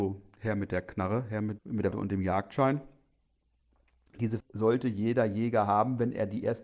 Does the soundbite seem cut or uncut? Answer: cut